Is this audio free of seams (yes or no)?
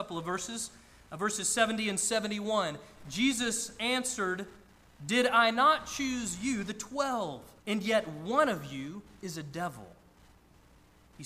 no